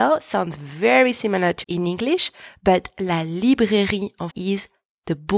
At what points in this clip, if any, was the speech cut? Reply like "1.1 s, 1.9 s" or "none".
1.6 s, 4.3 s